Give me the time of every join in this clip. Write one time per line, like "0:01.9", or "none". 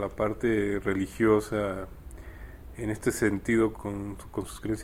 0:03.7